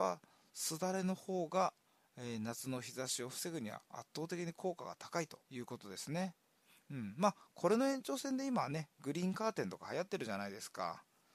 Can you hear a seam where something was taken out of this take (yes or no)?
yes